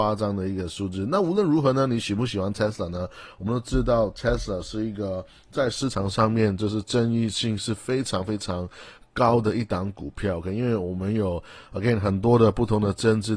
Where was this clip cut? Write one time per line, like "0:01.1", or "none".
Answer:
none

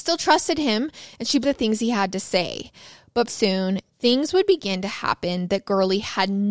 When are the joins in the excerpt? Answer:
0:01.4
0:03.3

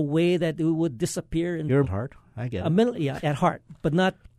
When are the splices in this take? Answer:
0:01.8
0:02.9

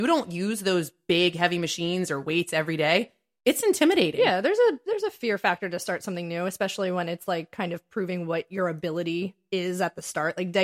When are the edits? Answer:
none

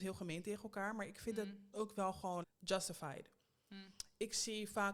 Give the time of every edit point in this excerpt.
0:01.7
0:02.4

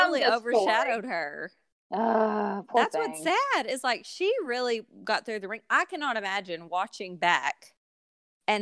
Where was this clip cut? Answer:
none

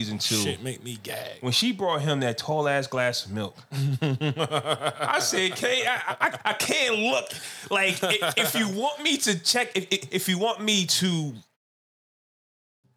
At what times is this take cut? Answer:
none

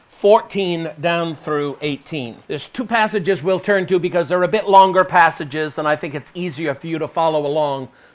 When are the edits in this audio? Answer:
0:02.4

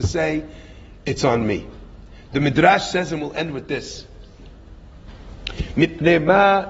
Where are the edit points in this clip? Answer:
none

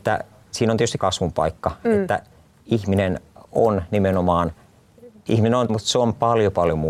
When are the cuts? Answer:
0:01.0
0:05.3
0:05.7

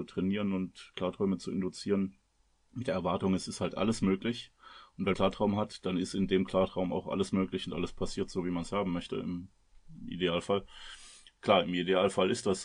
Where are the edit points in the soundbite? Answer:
0:05.1

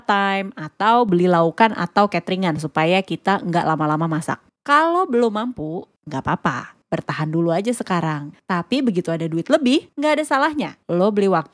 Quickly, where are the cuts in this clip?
none

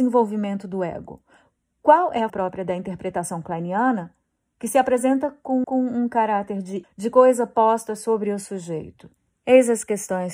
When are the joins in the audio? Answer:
0:02.3
0:05.6
0:06.8

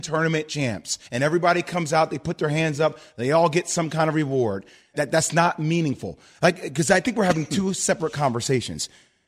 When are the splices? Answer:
0:01.1
0:04.9

